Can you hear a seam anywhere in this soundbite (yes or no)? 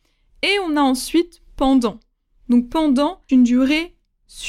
yes